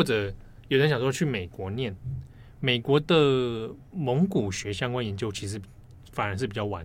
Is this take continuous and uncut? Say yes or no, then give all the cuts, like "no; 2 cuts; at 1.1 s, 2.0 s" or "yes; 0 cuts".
yes; 0 cuts